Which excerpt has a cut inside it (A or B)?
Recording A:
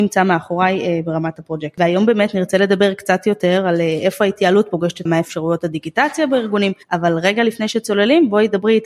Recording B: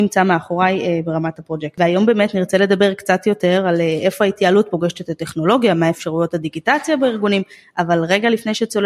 A